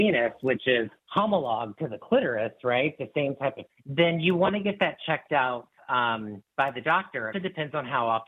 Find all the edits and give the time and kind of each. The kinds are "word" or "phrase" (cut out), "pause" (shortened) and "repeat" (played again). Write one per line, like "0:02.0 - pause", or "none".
0:01.0 - pause
0:03.7 - word
0:06.5 - pause
0:07.3 - word